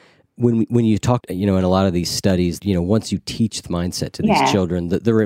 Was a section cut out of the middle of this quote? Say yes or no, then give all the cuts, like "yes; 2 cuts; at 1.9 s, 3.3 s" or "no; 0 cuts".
yes; 3 cuts; at 1.2 s, 2.6 s, 3.6 s